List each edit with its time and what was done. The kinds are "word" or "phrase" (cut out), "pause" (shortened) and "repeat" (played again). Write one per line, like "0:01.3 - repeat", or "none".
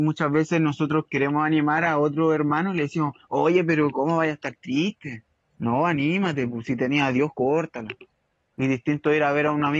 none